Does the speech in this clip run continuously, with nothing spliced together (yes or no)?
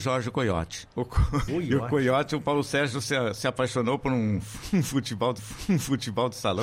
no